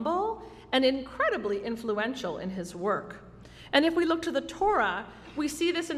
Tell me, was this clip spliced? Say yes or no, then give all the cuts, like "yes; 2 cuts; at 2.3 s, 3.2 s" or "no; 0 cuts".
no; 0 cuts